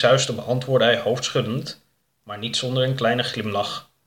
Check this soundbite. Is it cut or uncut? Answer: uncut